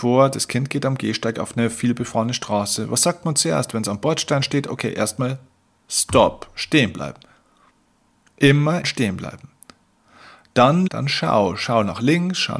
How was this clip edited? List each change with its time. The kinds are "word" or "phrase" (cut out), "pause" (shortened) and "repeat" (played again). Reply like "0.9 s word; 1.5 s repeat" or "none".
8.8 s word; 10.9 s word